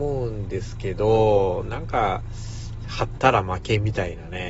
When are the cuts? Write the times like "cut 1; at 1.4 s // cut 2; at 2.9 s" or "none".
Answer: none